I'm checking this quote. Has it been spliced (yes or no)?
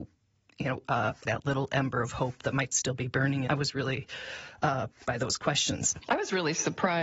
yes